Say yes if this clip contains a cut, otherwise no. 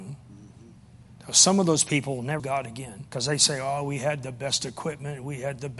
yes